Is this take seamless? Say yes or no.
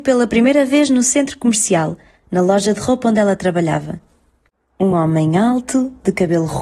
yes